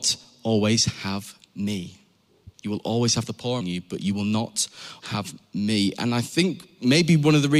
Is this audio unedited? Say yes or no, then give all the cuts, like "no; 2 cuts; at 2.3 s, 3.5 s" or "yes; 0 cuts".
no; 3 cuts; at 2.5 s, 3.6 s, 5.0 s